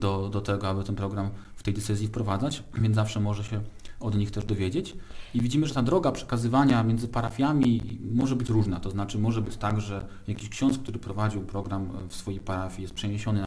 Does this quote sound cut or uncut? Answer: uncut